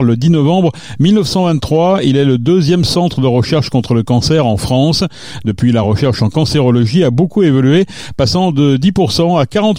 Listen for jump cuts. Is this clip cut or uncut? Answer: uncut